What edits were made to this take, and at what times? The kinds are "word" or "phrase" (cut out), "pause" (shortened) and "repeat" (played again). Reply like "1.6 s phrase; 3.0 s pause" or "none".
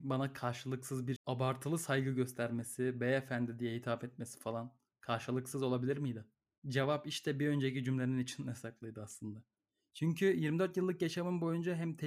1.2 s word